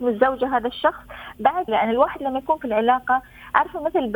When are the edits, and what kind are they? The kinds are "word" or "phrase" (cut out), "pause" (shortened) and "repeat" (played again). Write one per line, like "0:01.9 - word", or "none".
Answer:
0:01.7 - word